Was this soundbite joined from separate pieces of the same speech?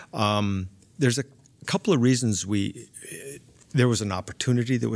no; 0 cuts

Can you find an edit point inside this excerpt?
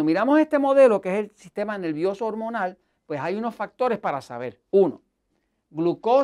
no; 0 cuts

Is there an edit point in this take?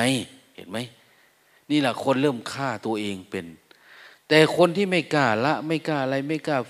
no; 0 cuts

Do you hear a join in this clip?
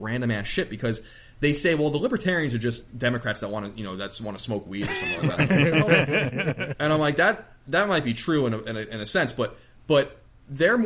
no; 0 cuts

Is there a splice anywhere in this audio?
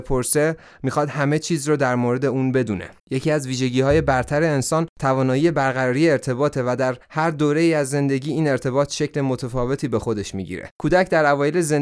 yes; 4 cuts; at 3.0 s, 4.9 s, 7.0 s, 10.8 s

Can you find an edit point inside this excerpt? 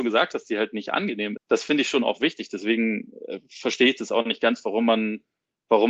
yes; 1 cut; at 1.4 s

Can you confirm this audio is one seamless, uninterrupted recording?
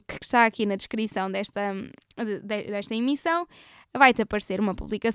yes; 0 cuts

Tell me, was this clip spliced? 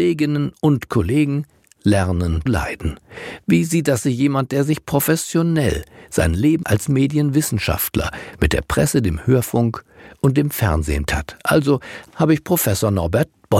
yes; 4 cuts; at 2.5 s, 4.0 s, 6.6 s, 11.1 s

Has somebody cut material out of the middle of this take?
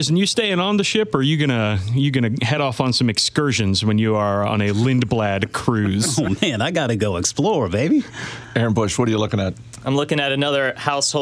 no; 0 cuts

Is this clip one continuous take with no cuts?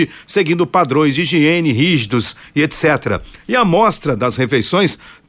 yes; 0 cuts

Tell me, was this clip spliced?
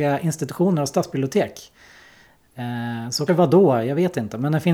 yes; 1 cut; at 3.3 s

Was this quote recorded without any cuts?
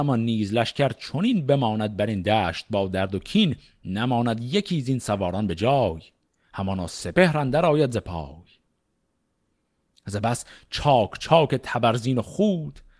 yes; 0 cuts

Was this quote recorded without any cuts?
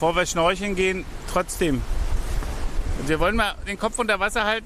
yes; 0 cuts

